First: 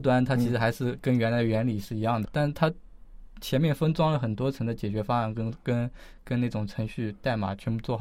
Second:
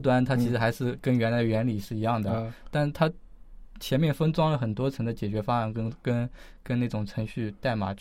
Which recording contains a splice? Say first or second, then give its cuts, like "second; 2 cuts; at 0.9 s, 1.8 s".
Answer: first; 1 cut; at 2.2 s